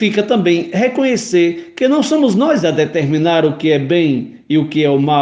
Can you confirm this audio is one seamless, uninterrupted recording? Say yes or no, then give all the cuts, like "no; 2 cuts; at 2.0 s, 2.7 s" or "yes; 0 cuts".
yes; 0 cuts